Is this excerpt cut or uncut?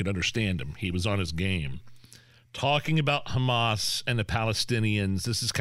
uncut